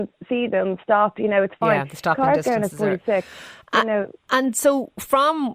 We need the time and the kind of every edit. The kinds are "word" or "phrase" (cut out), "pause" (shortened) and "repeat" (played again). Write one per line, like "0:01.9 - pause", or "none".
none